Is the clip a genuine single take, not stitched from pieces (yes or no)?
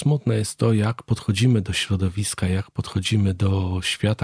yes